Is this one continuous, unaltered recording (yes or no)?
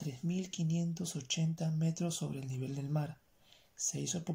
yes